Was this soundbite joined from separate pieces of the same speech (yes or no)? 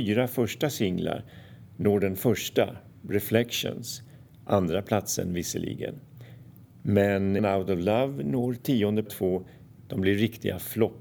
yes